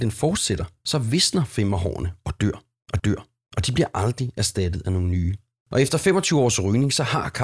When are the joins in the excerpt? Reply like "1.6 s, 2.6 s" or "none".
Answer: 3.0 s